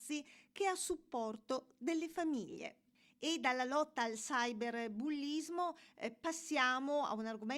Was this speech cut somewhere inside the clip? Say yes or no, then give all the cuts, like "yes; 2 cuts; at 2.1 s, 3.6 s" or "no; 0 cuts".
no; 0 cuts